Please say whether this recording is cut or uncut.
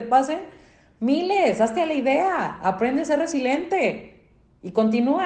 uncut